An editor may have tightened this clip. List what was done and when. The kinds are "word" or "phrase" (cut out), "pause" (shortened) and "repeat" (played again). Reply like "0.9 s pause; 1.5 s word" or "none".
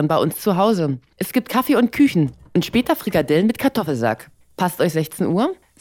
none